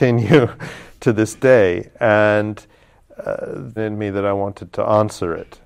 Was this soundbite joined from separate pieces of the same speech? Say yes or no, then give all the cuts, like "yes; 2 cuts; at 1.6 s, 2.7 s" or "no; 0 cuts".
yes; 1 cut; at 3.8 s